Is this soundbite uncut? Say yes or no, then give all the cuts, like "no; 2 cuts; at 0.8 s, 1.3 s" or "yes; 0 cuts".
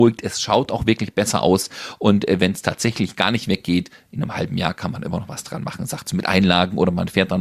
yes; 0 cuts